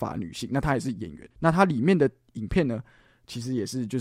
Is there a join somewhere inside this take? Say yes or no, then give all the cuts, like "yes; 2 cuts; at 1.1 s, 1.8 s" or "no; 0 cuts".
yes; 1 cut; at 1.3 s